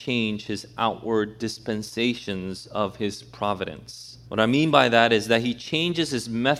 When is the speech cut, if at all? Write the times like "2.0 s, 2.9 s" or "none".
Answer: 4.2 s

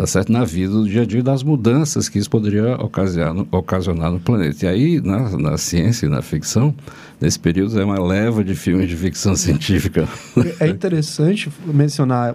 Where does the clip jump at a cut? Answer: none

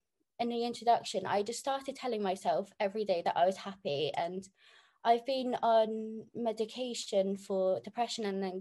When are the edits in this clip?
none

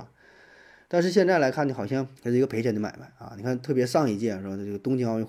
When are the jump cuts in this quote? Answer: 2.2 s

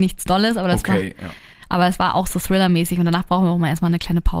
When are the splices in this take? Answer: none

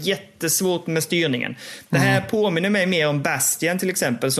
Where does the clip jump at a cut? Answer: none

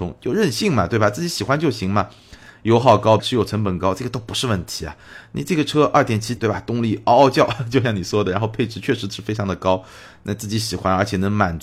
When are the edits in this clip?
3.2 s, 6.4 s

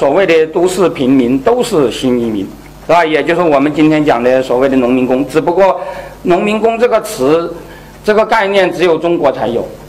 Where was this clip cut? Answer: none

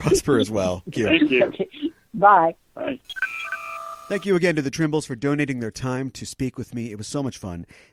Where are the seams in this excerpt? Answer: 0.9 s

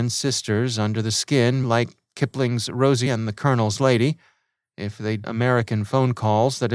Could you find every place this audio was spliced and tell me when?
1.6 s, 3.1 s, 5.2 s

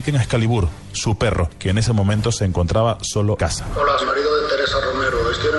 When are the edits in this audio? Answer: 3.4 s, 4.0 s

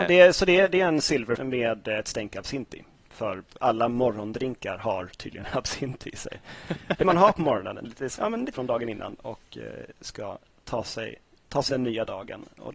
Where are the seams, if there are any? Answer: 1.4 s, 7.0 s, 7.8 s, 8.2 s, 8.5 s, 11.7 s

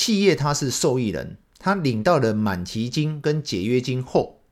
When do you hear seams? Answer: 1.4 s

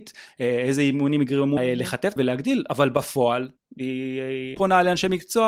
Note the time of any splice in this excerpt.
1.6 s, 2.2 s, 3.6 s, 4.5 s

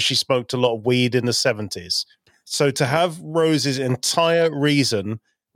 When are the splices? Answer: none

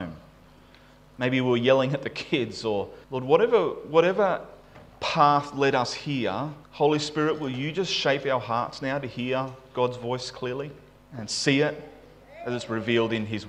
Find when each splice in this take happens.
3.0 s, 6.6 s, 11.0 s

